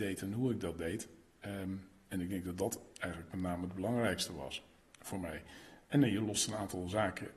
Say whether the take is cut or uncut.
uncut